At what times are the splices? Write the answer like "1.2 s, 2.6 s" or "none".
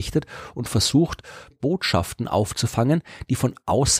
1.5 s